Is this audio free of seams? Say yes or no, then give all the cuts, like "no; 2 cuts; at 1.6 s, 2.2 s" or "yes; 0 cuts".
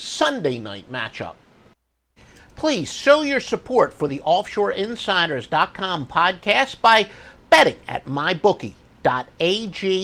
yes; 0 cuts